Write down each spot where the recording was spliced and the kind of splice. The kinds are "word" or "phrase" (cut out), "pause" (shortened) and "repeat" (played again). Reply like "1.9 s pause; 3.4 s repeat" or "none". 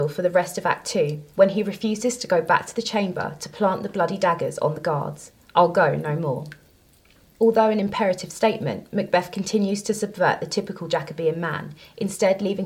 none